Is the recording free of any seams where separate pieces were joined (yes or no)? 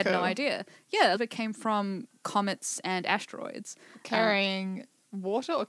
no